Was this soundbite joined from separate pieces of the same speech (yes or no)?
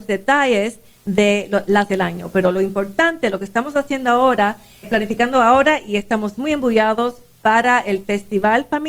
yes